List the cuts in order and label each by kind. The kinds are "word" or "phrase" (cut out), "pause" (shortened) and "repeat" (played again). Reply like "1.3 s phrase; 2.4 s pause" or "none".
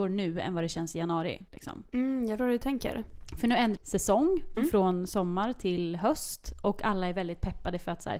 1.5 s pause; 2.4 s word; 3.8 s word; 4.6 s word